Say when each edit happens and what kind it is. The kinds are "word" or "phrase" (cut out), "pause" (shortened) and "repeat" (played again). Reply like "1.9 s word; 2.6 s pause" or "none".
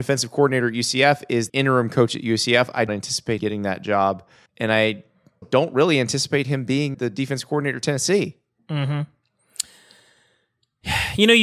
1.5 s word; 2.9 s word; 3.4 s word; 4.5 s word; 5.4 s word; 6.9 s word